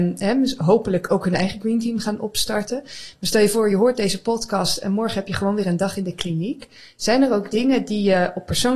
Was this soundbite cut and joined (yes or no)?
no